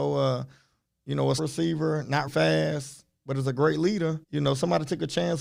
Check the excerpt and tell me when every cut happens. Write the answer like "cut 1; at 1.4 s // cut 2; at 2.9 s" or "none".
cut 1; at 1.4 s // cut 2; at 2.3 s // cut 3; at 4.2 s